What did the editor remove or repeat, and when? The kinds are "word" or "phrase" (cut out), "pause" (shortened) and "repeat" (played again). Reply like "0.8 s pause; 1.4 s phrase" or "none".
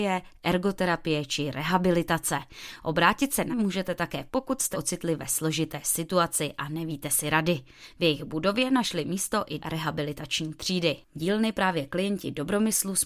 3.5 s word; 4.3 s phrase; 4.7 s word; 9.6 s word; 11.2 s phrase